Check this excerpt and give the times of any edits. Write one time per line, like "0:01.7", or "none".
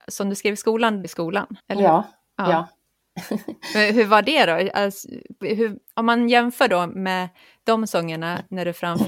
0:01.0
0:01.6